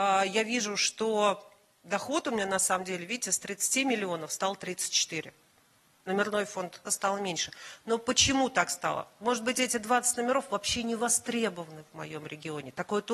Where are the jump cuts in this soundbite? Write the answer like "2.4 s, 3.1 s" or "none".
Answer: 6.9 s